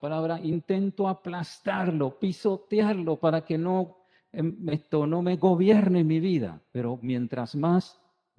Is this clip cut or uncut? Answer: uncut